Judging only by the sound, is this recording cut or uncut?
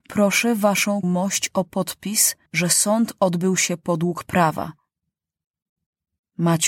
cut